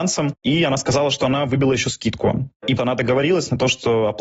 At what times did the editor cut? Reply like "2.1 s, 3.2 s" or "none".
2.8 s